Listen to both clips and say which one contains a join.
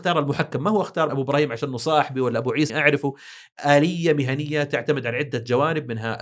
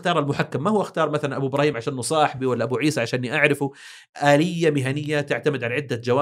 first; 2 cuts; at 1.1 s, 2.7 s

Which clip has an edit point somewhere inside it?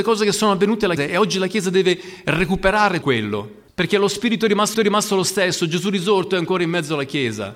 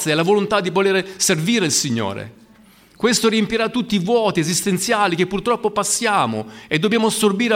first; 4 cuts; at 1.0 s, 3.0 s, 3.7 s, 4.7 s

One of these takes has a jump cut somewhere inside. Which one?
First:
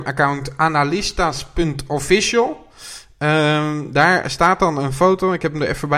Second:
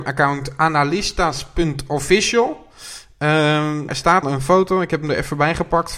second; 2 cuts; at 3.9 s, 4.2 s

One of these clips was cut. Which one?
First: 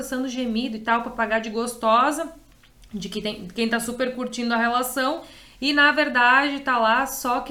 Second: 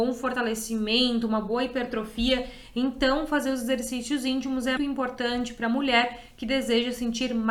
second; 1 cut; at 4.8 s

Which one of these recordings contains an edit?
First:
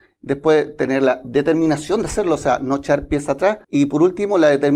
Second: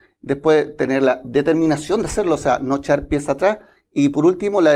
first; 1 cut; at 3.6 s

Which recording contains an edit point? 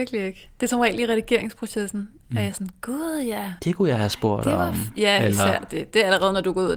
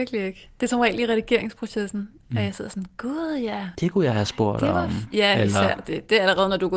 first; 1 cut; at 2.5 s

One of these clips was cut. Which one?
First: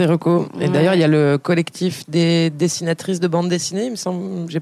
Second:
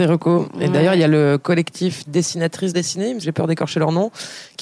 second; 3 cuts; at 2.1 s, 2.7 s, 3.2 s

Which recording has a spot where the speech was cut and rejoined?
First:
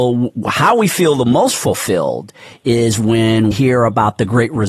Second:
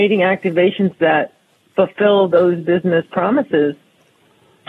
first; 1 cut; at 3.5 s

